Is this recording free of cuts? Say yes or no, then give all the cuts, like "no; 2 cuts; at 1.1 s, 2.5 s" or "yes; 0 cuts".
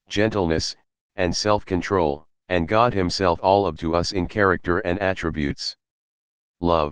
no; 3 cuts; at 2.4 s, 3.4 s, 3.8 s